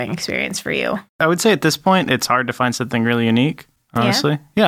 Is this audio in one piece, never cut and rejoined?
no; 1 cut; at 1.1 s

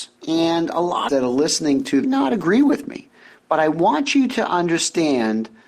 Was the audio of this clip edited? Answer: yes; 2 cuts; at 1.1 s, 2.0 s

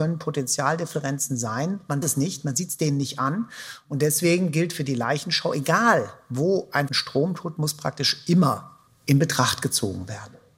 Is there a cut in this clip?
yes; 2 cuts; at 2.0 s, 6.9 s

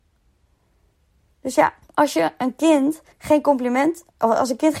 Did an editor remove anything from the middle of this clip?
yes; 2 cuts; at 1.8 s, 3.1 s

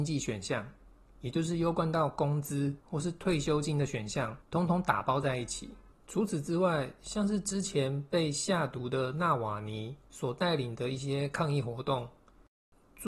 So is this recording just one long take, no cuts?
no; 4 cuts; at 2.8 s, 4.4 s, 5.9 s, 10.1 s

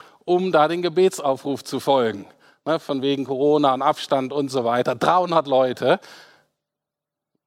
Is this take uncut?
yes; 0 cuts

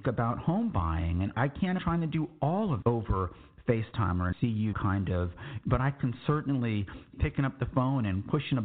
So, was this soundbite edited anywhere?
yes; 7 cuts; at 1.3 s, 1.8 s, 2.8 s, 4.3 s, 4.7 s, 5.6 s, 7.1 s

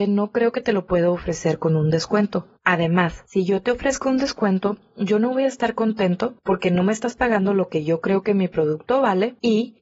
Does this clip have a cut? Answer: no; 0 cuts

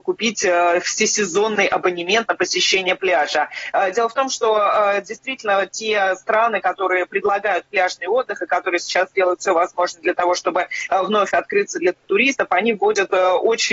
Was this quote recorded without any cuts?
yes; 0 cuts

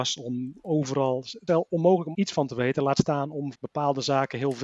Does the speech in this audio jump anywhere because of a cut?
yes; 3 cuts; at 1.5 s, 2.1 s, 3.5 s

